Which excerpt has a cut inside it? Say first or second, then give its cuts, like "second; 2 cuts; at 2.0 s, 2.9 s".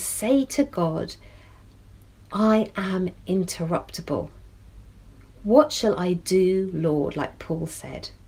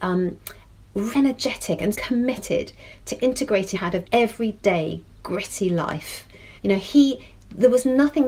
second; 5 cuts; at 1.1 s, 1.9 s, 3.7 s, 4.0 s, 6.6 s